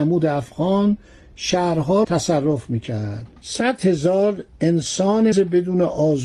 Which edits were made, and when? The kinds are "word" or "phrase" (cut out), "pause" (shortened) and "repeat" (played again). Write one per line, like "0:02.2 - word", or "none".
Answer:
0:02.0 - word
0:03.4 - pause
0:05.3 - word